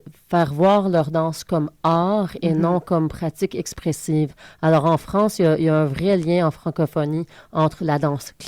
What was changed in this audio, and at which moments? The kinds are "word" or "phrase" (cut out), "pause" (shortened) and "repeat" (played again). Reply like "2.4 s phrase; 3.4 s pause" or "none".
none